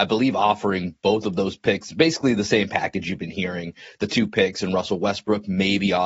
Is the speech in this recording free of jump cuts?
yes; 0 cuts

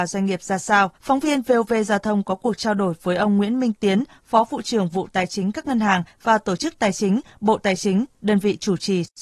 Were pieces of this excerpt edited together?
yes; 1 cut; at 1.0 s

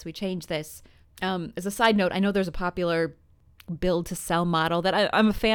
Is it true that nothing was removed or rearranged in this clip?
yes; 0 cuts

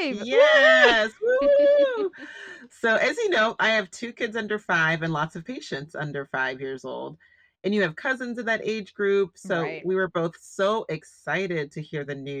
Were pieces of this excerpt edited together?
no; 0 cuts

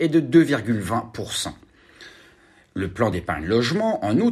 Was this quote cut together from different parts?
no; 0 cuts

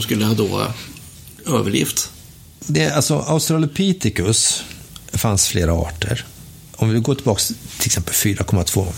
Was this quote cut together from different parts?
no; 0 cuts

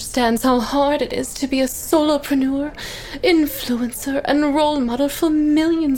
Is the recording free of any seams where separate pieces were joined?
yes; 0 cuts

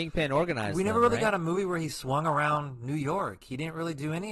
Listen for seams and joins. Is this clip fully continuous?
yes; 0 cuts

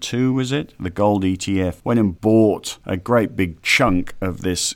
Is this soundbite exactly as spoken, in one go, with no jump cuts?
yes; 0 cuts

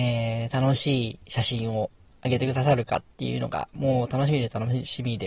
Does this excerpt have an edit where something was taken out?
no; 0 cuts

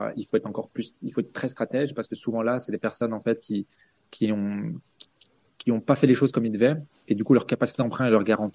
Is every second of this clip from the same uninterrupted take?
yes; 0 cuts

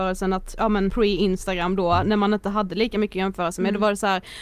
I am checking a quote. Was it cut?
no; 0 cuts

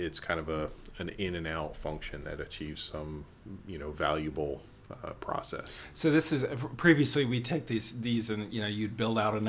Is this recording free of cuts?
yes; 0 cuts

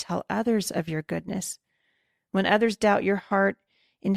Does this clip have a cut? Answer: no; 0 cuts

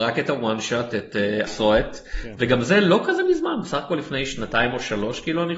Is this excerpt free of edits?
no; 1 cut; at 1.5 s

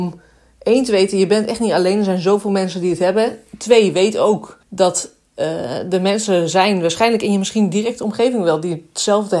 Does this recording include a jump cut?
yes; 1 cut; at 4.6 s

